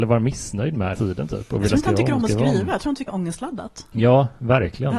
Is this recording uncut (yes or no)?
no